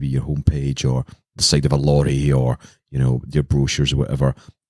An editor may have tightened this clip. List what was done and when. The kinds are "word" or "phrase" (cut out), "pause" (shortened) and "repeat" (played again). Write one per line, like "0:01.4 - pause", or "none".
0:01.4 - word